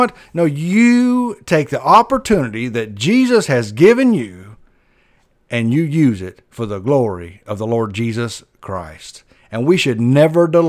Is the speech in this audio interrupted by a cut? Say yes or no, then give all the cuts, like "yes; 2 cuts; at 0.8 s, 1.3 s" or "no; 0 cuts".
no; 0 cuts